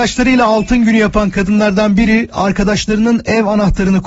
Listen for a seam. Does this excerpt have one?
no; 0 cuts

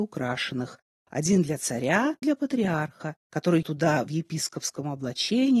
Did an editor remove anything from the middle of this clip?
yes; 2 cuts; at 2.2 s, 3.6 s

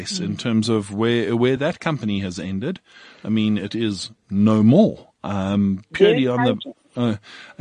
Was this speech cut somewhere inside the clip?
no; 0 cuts

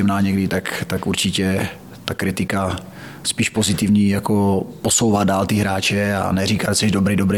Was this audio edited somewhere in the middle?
no; 0 cuts

